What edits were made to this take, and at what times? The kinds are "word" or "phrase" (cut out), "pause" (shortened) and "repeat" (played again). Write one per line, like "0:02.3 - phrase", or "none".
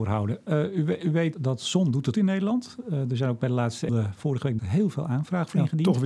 0:01.3 - word
0:02.1 - word
0:03.9 - word
0:04.6 - word